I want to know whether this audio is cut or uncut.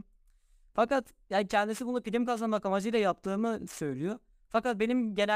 uncut